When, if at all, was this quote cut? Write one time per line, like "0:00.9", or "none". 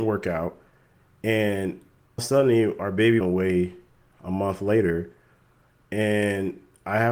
0:02.2
0:03.2